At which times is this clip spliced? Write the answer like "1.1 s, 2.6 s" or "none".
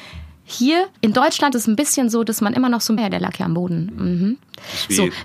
1.0 s, 1.5 s, 3.0 s